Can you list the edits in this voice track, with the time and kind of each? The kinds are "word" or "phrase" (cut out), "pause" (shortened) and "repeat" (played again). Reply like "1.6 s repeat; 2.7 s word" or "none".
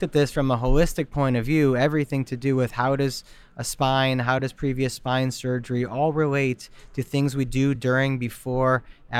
none